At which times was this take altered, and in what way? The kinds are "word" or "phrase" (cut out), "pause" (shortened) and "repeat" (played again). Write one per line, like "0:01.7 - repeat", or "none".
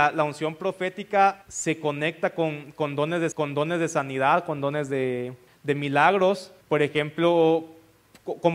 0:01.4 - pause
0:03.3 - repeat
0:05.5 - pause
0:06.6 - pause